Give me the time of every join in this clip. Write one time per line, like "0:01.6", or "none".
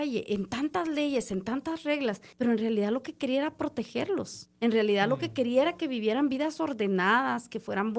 0:02.3
0:04.5

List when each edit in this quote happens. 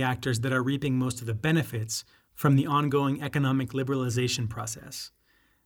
none

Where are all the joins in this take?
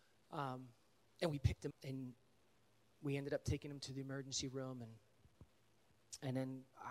0:01.7

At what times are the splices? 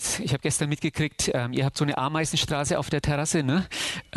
none

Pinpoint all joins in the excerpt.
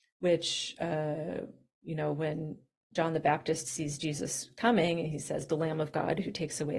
0:02.9
0:05.5

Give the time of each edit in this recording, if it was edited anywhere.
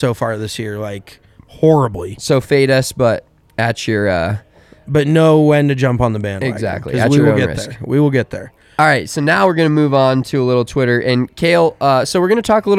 none

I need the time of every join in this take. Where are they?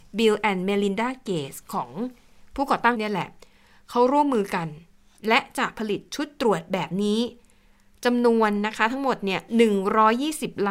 0:02.9

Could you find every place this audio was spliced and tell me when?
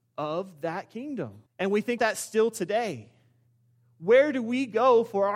0:01.5
0:02.0

